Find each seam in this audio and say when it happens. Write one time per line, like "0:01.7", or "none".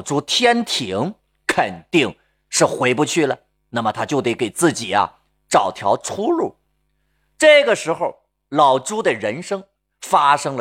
none